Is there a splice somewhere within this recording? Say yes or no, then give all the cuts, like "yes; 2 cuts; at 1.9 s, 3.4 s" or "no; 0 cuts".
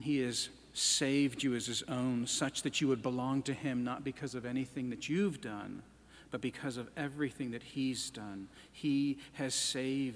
no; 0 cuts